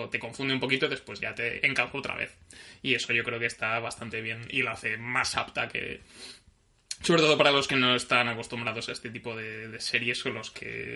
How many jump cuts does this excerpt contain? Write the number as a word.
zero